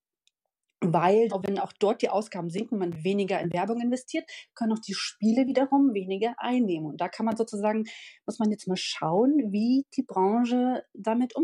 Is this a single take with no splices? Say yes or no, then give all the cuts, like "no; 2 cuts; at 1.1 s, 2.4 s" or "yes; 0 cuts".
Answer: no; 1 cut; at 1.3 s